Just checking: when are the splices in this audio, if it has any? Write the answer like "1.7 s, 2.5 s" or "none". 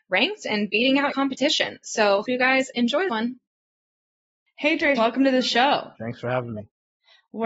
1.1 s, 2.2 s, 3.1 s, 5.0 s, 6.0 s